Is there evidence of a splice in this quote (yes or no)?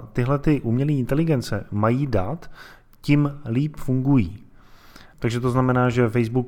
no